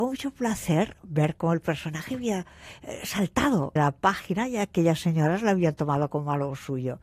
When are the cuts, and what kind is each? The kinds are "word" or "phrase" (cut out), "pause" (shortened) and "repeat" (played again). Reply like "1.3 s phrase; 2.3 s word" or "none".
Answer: 3.8 s word